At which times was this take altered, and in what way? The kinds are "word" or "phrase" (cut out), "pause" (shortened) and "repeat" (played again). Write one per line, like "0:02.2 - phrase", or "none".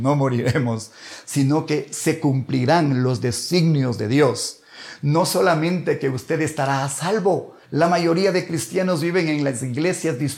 0:07.6 - pause